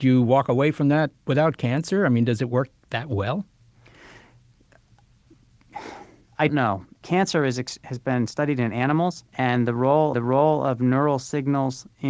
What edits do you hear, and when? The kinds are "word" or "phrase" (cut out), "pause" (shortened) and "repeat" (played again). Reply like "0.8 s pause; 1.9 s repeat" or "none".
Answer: 1.1 s word; 6.5 s word; 9.3 s pause; 10.1 s repeat

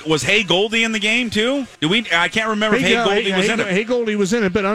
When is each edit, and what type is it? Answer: 1.8 s pause

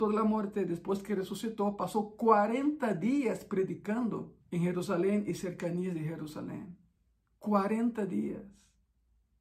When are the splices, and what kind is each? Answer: 4.4 s pause

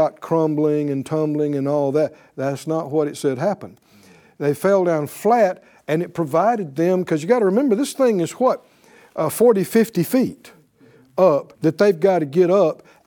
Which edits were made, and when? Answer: 11.6 s pause

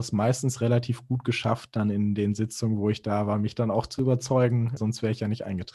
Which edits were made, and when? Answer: 4.8 s word

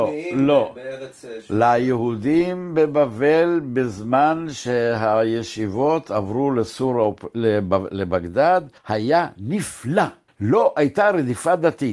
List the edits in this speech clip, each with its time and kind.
8.8 s pause; 10.3 s pause

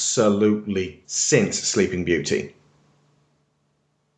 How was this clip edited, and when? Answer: 1.0 s word

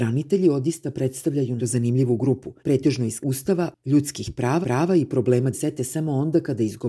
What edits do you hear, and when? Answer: 1.6 s word; 2.6 s pause; 3.2 s phrase; 4.6 s repeat; 5.5 s word

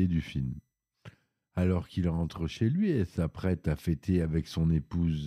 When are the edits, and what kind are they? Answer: none

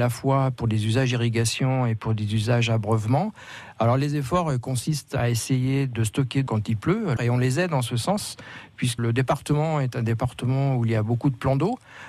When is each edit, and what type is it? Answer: 6.5 s word; 7.2 s word; 9.0 s word

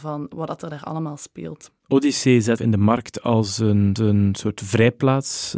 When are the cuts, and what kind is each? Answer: 2.6 s word; 4.0 s repeat

